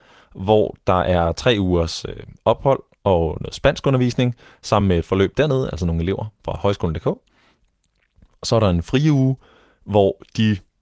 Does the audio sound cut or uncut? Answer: uncut